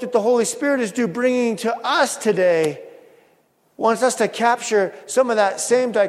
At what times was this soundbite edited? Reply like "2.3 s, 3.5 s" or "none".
none